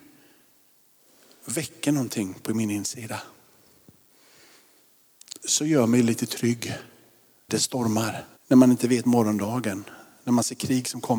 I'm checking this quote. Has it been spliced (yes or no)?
yes